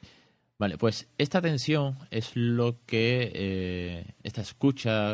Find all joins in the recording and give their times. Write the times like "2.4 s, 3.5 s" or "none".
4.1 s